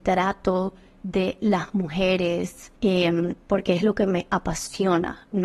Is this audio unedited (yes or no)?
no